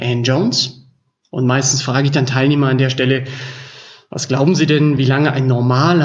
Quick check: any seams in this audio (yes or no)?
no